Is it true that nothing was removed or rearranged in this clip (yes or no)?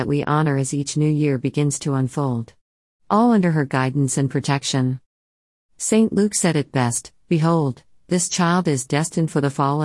yes